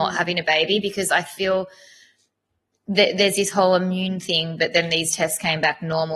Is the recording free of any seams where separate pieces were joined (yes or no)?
yes